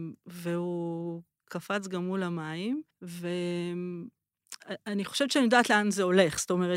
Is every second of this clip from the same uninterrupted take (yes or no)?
no